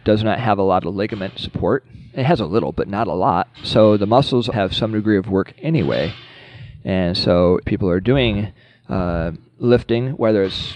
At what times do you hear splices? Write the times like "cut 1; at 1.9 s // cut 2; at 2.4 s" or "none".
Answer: cut 1; at 4.5 s // cut 2; at 7.6 s // cut 3; at 9.5 s